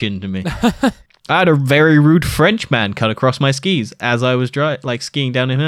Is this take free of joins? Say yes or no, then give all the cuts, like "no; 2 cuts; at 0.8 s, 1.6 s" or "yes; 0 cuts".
yes; 0 cuts